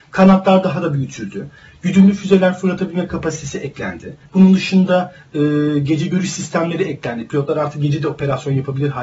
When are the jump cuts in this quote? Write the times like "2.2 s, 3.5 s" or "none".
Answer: 4.3 s